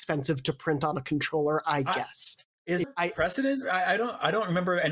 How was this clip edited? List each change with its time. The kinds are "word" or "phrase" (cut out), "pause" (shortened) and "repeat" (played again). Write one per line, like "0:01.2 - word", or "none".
0:02.8 - phrase